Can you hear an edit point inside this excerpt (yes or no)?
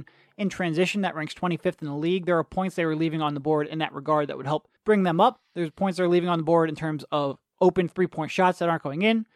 yes